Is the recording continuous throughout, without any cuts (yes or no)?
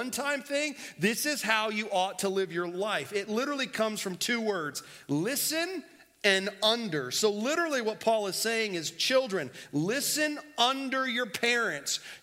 yes